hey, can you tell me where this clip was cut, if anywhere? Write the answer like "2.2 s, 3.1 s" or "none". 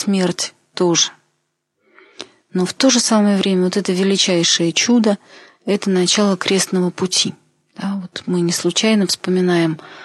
none